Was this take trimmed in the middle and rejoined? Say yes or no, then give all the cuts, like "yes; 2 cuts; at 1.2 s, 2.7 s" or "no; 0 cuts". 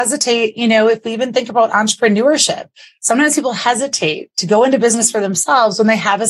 no; 0 cuts